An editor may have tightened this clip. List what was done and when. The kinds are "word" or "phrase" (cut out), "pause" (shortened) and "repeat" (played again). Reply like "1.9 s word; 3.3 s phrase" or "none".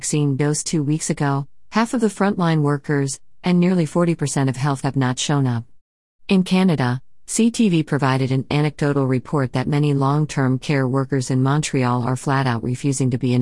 4.8 s phrase